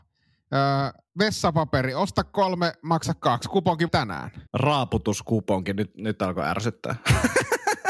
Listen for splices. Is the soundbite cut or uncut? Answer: cut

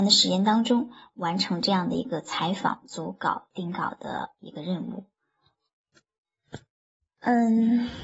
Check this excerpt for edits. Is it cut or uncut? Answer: uncut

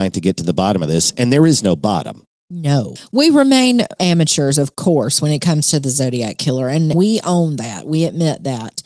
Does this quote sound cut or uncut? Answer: cut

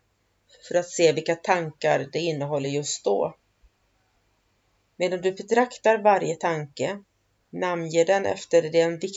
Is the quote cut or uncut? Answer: uncut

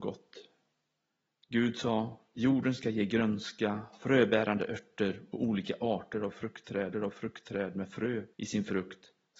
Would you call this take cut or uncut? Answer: cut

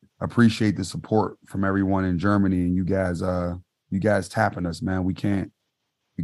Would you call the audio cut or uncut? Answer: uncut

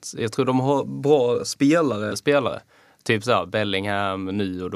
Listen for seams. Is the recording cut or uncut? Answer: cut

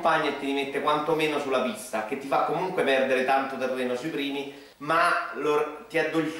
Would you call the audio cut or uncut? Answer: cut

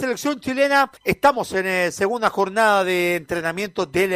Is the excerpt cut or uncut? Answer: cut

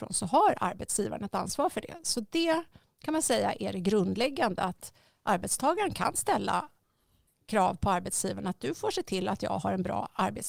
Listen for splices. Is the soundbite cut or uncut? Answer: uncut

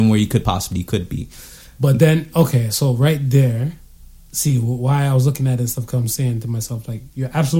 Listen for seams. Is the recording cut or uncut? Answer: uncut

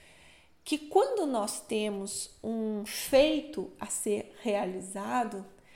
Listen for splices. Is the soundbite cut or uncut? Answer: uncut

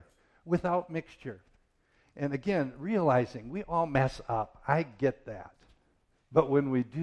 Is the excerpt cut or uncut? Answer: uncut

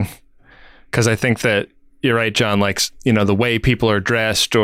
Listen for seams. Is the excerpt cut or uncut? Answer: uncut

